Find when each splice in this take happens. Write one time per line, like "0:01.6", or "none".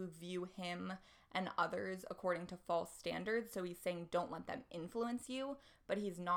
none